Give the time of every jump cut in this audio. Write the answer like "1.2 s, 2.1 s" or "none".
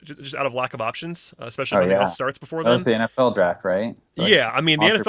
4.1 s

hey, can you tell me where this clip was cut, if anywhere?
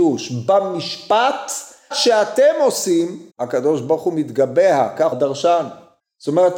1.9 s, 3.3 s, 5.1 s

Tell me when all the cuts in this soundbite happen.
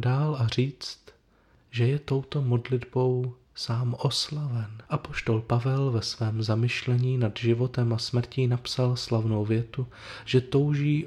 3.4 s, 4.9 s

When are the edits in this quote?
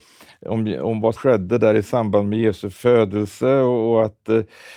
1.2 s

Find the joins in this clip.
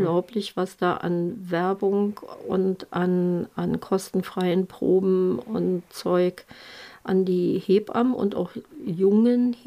none

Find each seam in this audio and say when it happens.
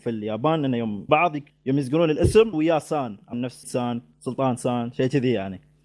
1.1 s, 1.5 s, 2.5 s, 3.3 s, 3.6 s

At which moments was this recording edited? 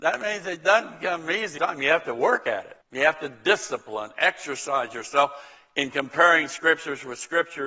1.6 s, 2.8 s

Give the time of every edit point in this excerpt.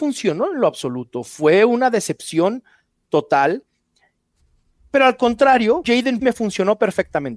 5.8 s, 6.2 s

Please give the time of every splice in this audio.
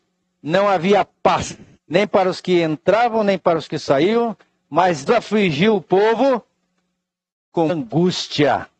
1.8 s, 5.1 s, 7.7 s

